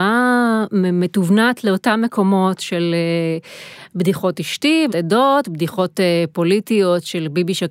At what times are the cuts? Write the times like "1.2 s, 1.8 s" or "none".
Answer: 4.9 s